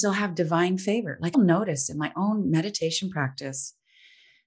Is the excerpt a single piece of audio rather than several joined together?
no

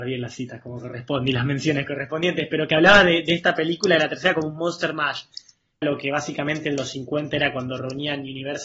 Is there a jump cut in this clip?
yes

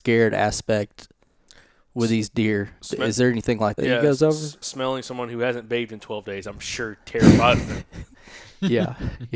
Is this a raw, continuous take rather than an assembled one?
no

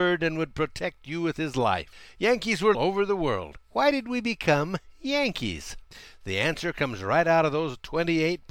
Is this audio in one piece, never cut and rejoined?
no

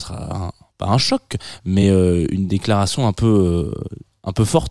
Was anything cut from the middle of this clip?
no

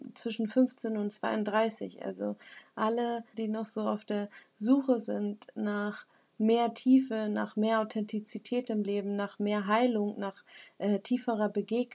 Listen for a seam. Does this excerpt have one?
yes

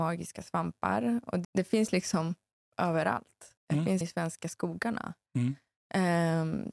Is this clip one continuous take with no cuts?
no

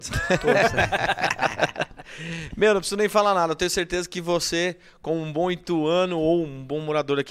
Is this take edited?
no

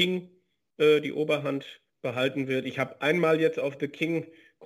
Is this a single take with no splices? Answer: no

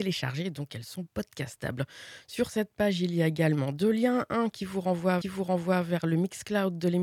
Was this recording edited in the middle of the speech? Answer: yes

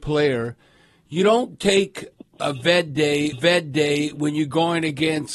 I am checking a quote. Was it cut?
yes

